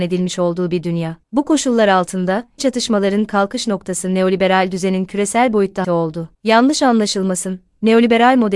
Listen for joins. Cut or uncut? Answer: cut